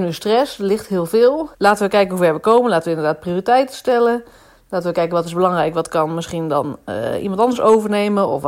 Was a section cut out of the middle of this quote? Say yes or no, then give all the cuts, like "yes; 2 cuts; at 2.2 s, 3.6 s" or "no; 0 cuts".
yes; 1 cut; at 1.5 s